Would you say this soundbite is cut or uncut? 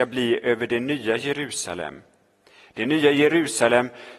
uncut